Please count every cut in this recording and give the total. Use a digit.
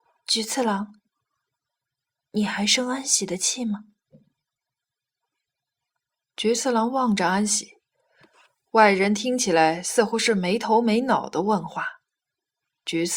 0